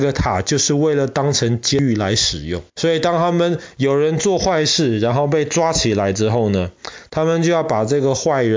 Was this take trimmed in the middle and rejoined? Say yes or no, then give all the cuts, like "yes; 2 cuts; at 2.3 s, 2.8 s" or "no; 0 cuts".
yes; 1 cut; at 2.7 s